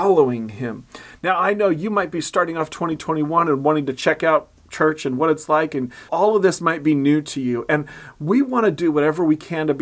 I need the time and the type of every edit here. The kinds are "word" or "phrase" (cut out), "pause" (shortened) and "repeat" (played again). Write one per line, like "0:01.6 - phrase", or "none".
0:06.1 - word